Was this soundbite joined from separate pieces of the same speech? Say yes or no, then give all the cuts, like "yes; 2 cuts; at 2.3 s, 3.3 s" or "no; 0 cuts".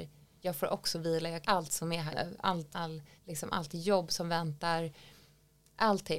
yes; 4 cuts; at 1.4 s, 2.1 s, 2.7 s, 3.2 s